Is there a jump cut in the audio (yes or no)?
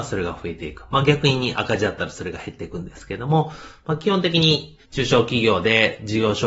yes